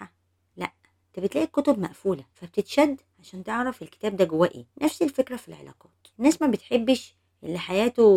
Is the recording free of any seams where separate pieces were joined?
no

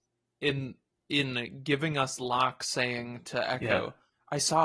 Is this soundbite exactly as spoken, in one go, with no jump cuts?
yes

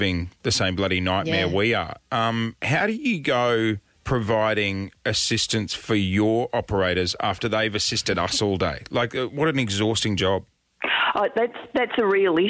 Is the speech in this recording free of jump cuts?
no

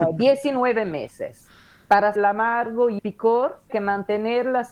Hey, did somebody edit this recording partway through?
yes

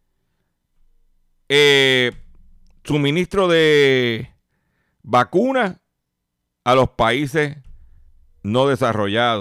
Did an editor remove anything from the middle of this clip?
no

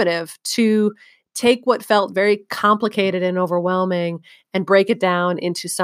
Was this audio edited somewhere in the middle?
no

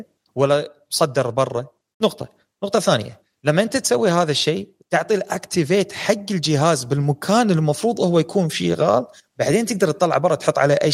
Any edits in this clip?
no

